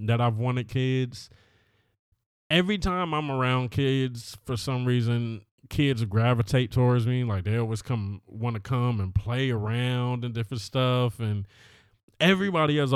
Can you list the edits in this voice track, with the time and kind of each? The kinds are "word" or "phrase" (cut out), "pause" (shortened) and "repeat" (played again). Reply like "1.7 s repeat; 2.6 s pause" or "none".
none